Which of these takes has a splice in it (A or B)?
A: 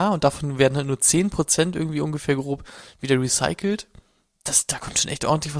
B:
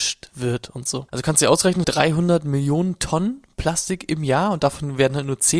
B